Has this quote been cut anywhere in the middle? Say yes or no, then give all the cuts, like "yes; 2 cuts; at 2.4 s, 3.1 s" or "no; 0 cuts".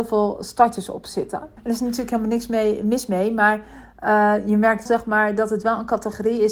yes; 2 cuts; at 1.6 s, 4.9 s